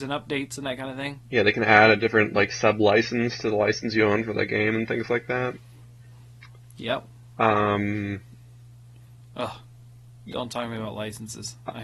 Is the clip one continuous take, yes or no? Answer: yes